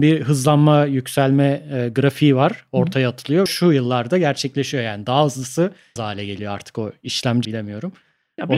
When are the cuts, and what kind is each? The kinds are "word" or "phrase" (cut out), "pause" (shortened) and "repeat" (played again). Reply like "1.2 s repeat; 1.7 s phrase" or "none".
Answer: 3.5 s phrase; 6.0 s word; 7.4 s phrase